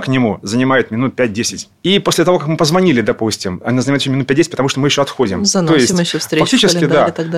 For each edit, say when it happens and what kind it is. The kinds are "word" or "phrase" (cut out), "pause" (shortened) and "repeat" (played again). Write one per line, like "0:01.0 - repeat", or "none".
none